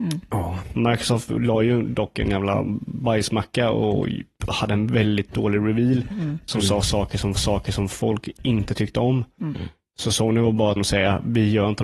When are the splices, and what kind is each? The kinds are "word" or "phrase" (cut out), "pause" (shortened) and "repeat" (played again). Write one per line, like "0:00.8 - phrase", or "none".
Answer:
0:07.4 - repeat
0:10.8 - word